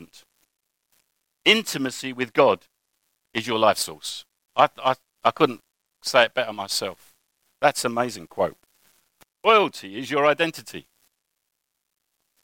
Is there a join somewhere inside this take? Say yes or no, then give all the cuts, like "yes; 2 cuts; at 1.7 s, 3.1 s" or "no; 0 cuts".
no; 0 cuts